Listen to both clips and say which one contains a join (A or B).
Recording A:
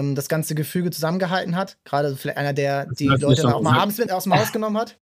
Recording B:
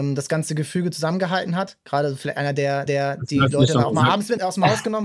B